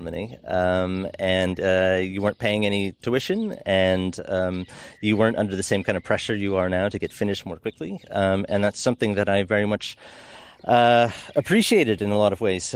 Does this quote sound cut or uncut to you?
uncut